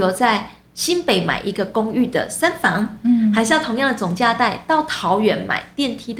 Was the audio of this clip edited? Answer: no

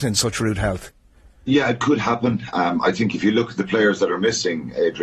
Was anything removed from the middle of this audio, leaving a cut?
no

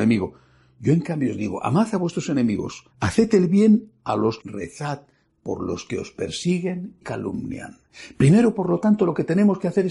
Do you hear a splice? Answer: yes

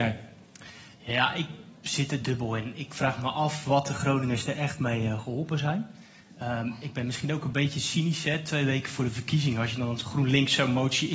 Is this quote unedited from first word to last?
yes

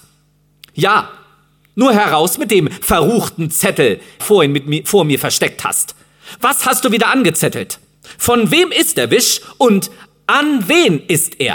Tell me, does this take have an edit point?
yes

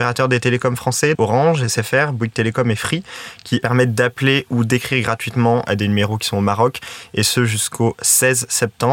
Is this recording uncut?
no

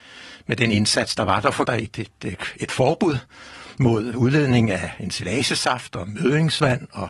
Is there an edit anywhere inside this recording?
yes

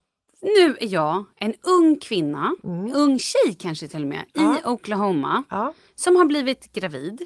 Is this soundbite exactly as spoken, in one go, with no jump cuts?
yes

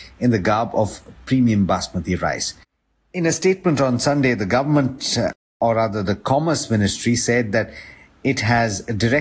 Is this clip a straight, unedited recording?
yes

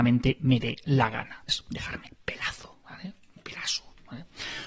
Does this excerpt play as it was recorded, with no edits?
no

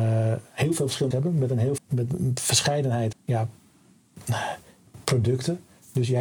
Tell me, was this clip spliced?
yes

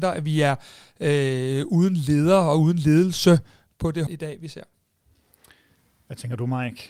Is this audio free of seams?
no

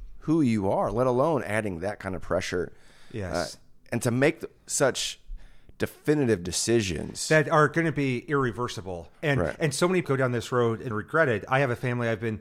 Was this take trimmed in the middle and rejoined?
yes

